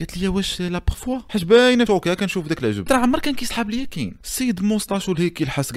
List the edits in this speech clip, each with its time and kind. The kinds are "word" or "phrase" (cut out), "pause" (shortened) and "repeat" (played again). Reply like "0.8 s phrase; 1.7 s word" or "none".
0.9 s word; 1.9 s word; 2.9 s word